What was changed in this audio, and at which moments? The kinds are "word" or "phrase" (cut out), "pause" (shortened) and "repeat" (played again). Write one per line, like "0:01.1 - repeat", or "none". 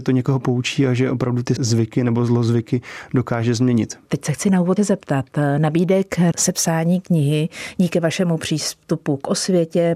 0:01.6 - word
0:04.8 - word
0:06.3 - word